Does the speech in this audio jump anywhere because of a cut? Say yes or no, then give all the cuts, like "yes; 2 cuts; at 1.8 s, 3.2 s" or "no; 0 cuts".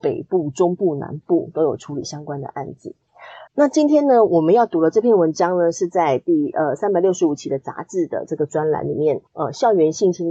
yes; 2 cuts; at 3.5 s, 9.3 s